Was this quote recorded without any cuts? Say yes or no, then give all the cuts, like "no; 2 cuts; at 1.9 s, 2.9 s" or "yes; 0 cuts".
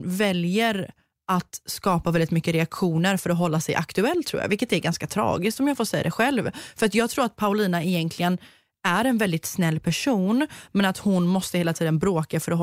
yes; 0 cuts